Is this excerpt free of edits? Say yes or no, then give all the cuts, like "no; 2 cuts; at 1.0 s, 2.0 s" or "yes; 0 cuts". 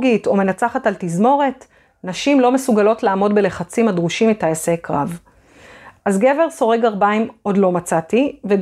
yes; 0 cuts